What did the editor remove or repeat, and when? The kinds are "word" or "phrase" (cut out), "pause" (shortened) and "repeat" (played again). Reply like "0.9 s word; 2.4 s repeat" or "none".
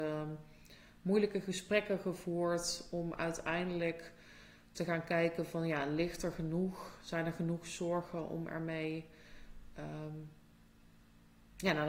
none